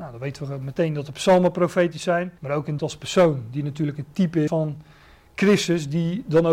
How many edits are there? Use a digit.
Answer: 3